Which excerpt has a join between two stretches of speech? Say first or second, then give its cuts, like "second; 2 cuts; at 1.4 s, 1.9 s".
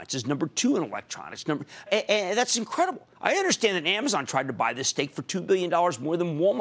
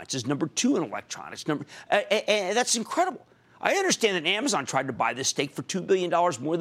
first; 2 cuts; at 1.9 s, 3.1 s